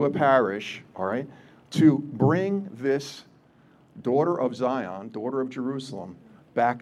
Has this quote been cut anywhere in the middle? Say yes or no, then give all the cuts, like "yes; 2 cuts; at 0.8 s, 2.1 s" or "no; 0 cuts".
no; 0 cuts